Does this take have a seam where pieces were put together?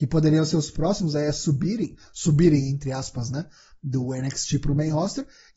no; 0 cuts

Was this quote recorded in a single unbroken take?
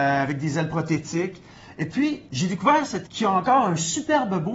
no; 2 cuts; at 2.3 s, 3.0 s

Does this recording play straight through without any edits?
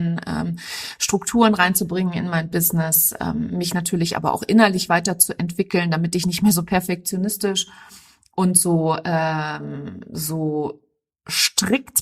yes; 0 cuts

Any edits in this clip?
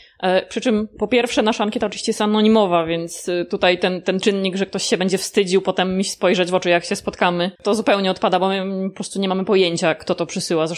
yes; 1 cut; at 7.5 s

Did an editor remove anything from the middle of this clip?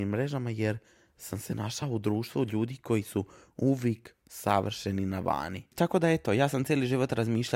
no; 0 cuts

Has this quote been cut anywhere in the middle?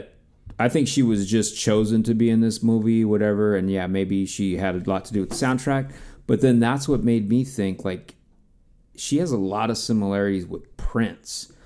no; 0 cuts

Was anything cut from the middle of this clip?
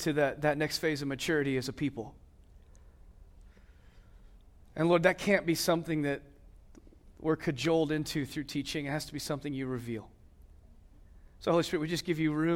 no; 0 cuts

